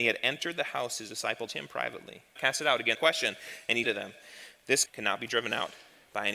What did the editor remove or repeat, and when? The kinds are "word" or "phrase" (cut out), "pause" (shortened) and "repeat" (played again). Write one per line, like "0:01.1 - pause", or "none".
0:01.5 - word
0:02.4 - phrase
0:02.9 - phrase
0:03.8 - word
0:04.9 - word